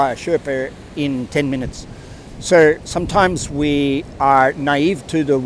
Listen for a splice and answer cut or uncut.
uncut